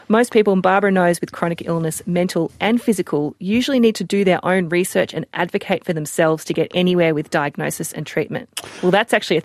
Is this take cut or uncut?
uncut